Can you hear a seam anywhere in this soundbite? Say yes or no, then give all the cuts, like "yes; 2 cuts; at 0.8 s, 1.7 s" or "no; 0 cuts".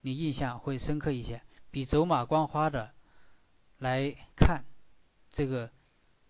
no; 0 cuts